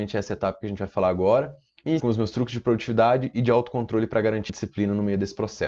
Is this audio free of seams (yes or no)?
no